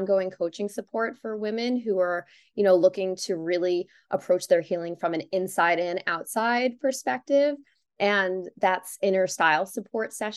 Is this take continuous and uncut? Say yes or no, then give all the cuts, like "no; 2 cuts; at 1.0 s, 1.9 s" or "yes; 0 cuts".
yes; 0 cuts